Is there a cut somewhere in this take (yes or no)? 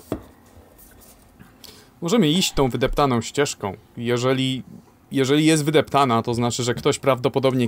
no